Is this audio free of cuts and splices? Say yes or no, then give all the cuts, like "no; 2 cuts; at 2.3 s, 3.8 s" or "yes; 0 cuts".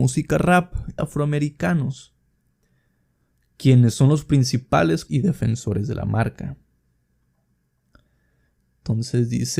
no; 2 cuts; at 1.0 s, 5.1 s